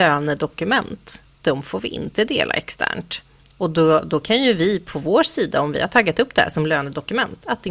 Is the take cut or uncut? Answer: uncut